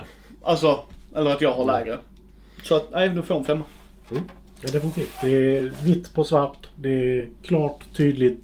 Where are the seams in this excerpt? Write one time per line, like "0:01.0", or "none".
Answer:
none